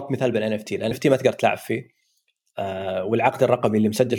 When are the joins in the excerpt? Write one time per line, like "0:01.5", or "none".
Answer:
0:00.9